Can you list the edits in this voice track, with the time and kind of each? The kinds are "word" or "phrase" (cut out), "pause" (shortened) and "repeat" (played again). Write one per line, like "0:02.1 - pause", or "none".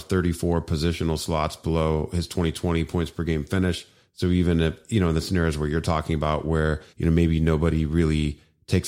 0:06.9 - pause